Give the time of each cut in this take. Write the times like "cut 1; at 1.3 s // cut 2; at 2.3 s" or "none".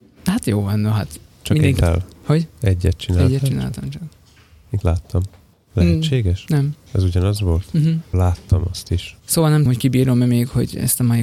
cut 1; at 1.8 s // cut 2; at 4.8 s // cut 3; at 8.1 s // cut 4; at 9.7 s